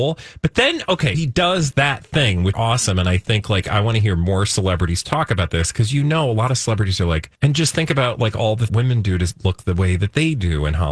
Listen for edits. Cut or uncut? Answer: cut